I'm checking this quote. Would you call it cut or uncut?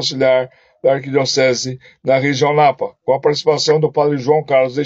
uncut